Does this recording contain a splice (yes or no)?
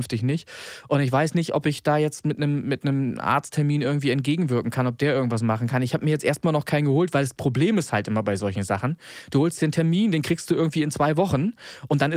no